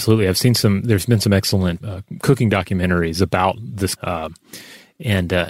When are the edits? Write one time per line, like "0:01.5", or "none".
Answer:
0:01.8
0:04.0